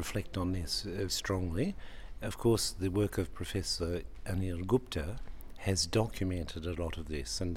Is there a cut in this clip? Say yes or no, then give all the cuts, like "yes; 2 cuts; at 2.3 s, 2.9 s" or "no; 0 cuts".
yes; 1 cut; at 1.1 s